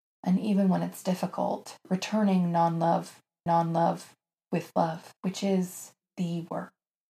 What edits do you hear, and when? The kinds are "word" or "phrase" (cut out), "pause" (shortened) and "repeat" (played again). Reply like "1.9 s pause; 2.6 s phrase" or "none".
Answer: 3.5 s repeat; 5.2 s pause; 6.0 s word